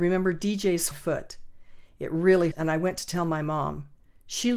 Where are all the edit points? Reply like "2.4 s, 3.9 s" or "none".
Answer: 0.9 s, 2.5 s

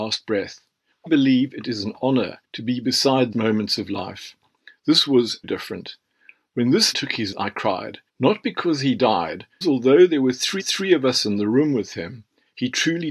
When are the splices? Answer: 1.1 s, 2.4 s, 3.3 s, 5.4 s, 6.9 s, 7.3 s, 8.1 s, 9.6 s, 10.6 s

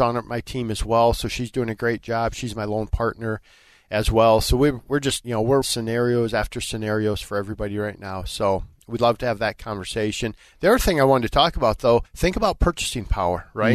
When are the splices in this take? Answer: 5.2 s, 5.6 s, 12.1 s

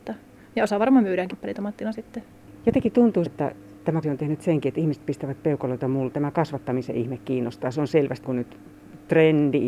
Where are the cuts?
1.3 s, 3.3 s, 4.0 s, 6.1 s, 8.2 s

